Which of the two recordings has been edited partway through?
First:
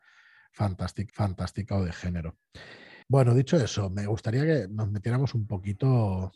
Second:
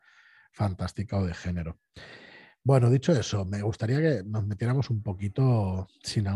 first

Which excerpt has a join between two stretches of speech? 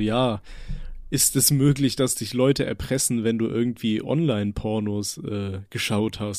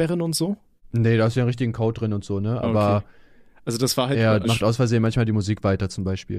second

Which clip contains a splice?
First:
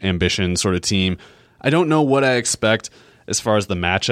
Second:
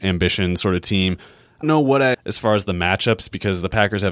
second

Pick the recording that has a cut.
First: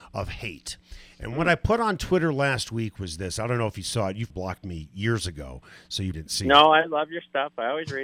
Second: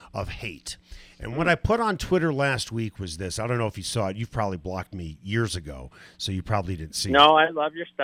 first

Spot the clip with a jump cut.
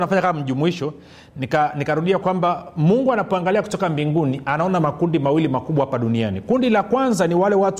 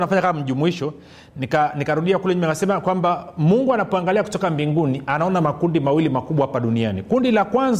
first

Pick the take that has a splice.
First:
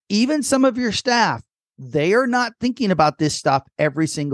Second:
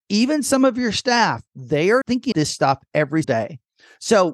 second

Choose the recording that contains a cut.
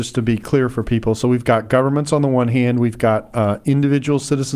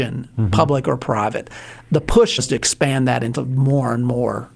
second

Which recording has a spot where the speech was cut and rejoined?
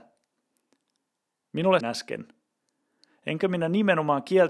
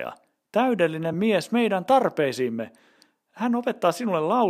first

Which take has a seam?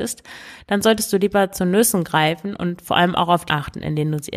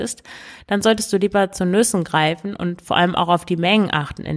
first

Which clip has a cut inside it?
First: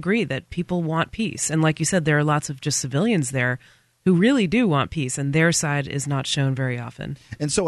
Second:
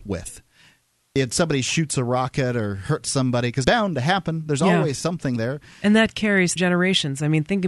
second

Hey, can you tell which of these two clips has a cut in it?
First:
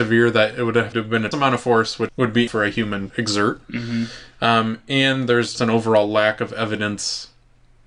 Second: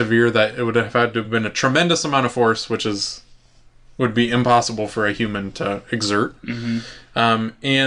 first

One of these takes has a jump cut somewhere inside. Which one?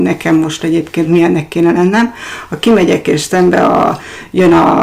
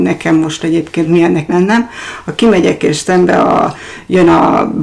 second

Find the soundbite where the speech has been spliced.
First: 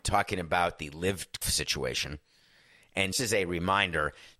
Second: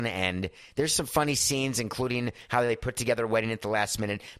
first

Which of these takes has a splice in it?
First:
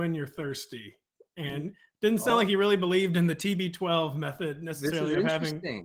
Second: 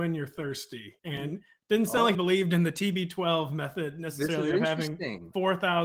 second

